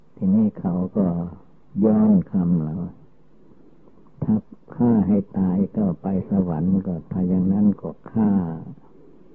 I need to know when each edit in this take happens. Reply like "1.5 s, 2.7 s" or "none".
none